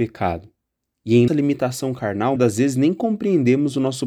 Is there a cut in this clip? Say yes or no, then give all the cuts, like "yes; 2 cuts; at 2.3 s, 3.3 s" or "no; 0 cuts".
yes; 2 cuts; at 1.3 s, 2.4 s